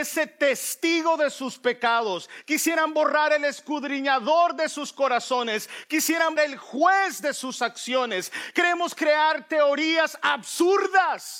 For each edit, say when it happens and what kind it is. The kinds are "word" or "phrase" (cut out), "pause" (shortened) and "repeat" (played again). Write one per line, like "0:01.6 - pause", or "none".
0:06.4 - word